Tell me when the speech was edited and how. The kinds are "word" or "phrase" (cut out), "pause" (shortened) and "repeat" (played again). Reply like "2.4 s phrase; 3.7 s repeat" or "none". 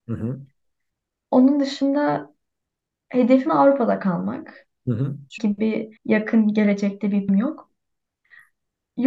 3.5 s word; 5.4 s phrase; 6.0 s pause; 7.3 s word